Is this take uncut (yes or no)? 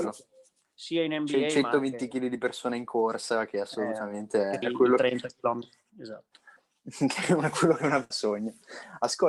no